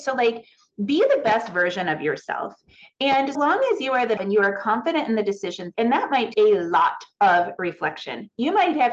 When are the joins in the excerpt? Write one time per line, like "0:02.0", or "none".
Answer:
0:03.3
0:04.2
0:05.7
0:06.3